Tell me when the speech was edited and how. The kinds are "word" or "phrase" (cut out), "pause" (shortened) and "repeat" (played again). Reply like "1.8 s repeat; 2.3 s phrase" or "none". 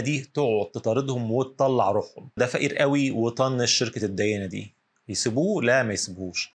2.4 s phrase